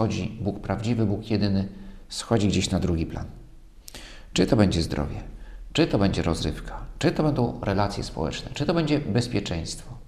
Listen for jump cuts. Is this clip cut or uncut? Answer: uncut